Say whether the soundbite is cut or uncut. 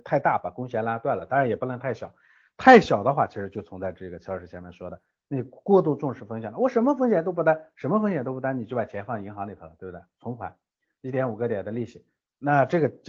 uncut